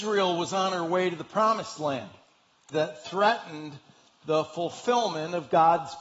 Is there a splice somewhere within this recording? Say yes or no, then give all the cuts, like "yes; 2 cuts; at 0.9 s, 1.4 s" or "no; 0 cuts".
yes; 1 cut; at 2.7 s